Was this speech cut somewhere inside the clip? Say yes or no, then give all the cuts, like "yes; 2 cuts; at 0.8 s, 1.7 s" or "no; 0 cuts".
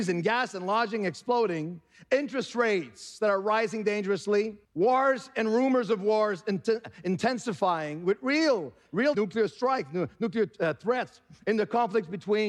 yes; 2 cuts; at 4.6 s, 9.1 s